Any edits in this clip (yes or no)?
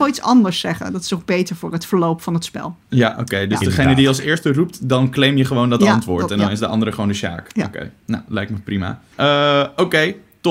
yes